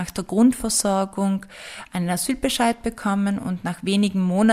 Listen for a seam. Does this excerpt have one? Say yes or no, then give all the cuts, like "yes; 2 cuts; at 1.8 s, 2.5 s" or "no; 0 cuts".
no; 0 cuts